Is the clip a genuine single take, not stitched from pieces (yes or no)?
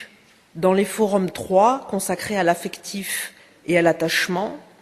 yes